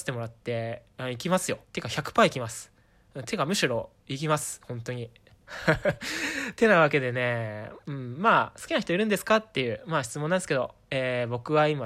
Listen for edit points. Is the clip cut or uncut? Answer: cut